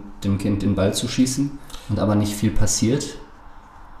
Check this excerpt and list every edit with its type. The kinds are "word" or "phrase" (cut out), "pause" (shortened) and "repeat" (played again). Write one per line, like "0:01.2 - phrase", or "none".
none